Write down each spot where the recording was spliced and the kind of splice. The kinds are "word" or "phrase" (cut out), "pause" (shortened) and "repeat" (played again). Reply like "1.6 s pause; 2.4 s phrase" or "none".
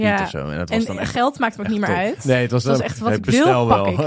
none